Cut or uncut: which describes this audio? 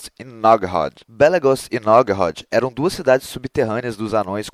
cut